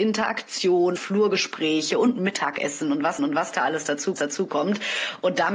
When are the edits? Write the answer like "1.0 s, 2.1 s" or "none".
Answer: 1.0 s, 3.2 s, 4.2 s

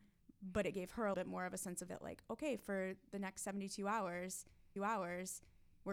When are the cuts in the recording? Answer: 1.1 s, 1.9 s, 4.8 s

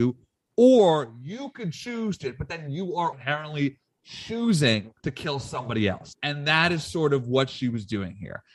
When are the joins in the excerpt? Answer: 2.2 s, 3.1 s, 5.0 s

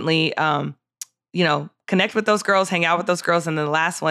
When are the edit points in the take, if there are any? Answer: none

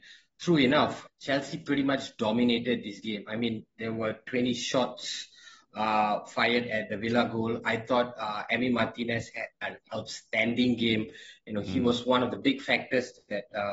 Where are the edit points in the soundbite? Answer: 1.1 s

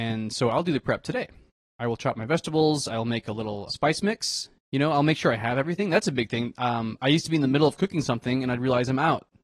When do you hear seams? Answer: 3.7 s

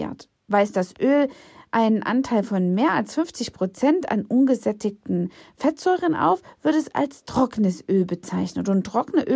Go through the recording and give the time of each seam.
none

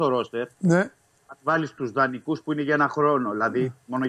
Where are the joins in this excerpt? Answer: none

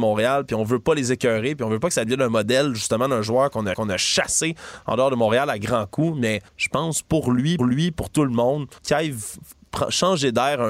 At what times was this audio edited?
3.7 s, 6.5 s, 7.6 s, 8.8 s

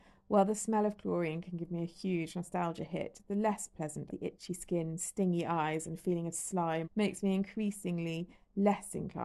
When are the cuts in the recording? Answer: 4.1 s, 6.8 s

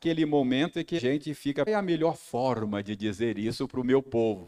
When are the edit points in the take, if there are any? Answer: 1.0 s, 1.7 s

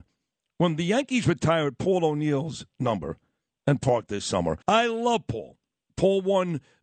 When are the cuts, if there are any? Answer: 3.8 s, 4.6 s

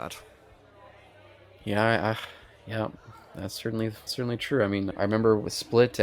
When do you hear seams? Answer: 4.1 s, 4.9 s

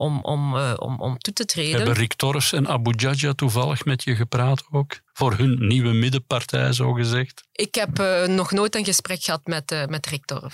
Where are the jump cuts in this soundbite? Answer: 5.1 s

